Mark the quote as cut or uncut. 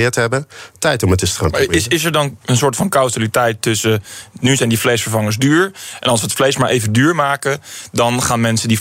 uncut